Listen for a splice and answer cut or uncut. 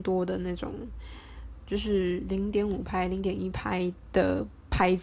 cut